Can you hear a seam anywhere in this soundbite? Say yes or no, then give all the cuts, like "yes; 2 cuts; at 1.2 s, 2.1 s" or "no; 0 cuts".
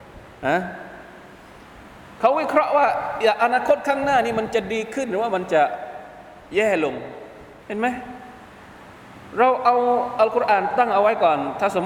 yes; 2 cuts; at 6.5 s, 7.6 s